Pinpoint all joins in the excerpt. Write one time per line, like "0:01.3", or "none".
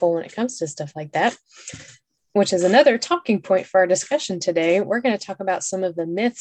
none

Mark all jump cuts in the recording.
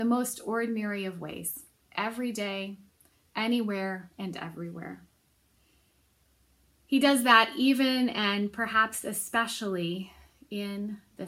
none

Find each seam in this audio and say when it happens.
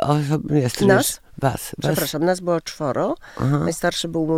0:01.3

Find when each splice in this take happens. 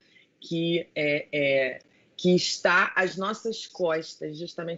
none

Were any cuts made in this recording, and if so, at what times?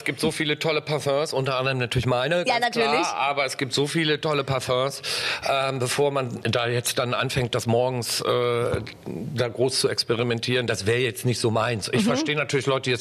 none

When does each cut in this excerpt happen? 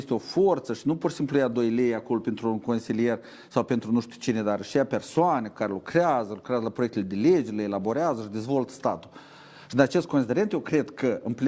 none

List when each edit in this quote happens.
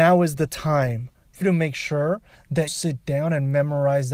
0:01.4
0:02.7

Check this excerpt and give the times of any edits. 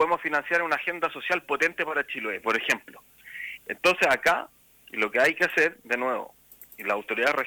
none

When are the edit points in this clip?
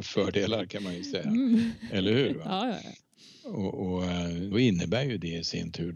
0:04.5

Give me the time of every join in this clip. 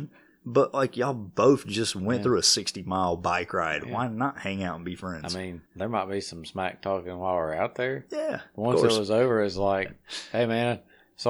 0:05.7

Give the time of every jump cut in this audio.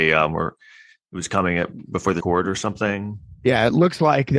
0:02.2

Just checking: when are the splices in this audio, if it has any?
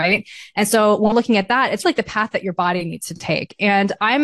0:01.1
0:01.8

